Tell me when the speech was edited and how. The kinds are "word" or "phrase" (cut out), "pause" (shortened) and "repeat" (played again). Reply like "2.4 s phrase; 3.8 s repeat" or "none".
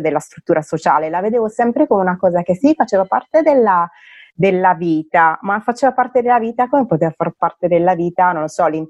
none

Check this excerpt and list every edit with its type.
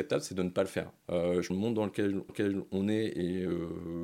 1.5 s phrase; 2.3 s repeat

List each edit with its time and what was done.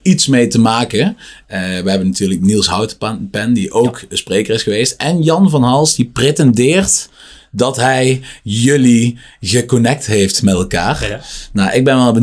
none

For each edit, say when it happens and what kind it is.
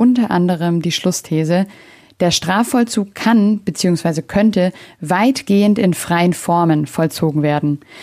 none

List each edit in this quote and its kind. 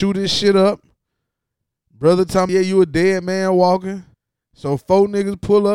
2.5 s word; 4.1 s pause

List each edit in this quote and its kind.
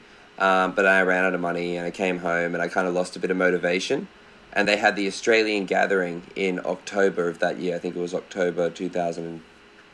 4.7 s word

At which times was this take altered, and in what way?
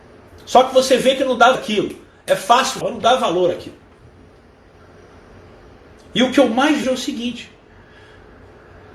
1.5 s word; 2.8 s word; 6.8 s word

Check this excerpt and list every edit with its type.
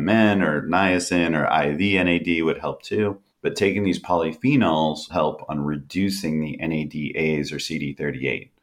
3.3 s pause; 5.1 s word

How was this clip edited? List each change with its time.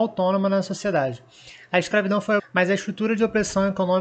2.4 s word

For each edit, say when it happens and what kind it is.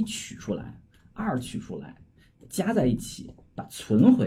none

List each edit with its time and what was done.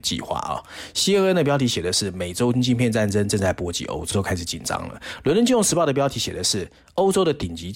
4.1 s word

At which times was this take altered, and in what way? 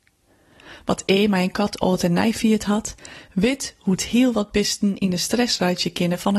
none

